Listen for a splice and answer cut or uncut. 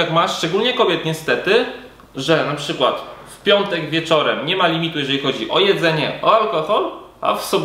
uncut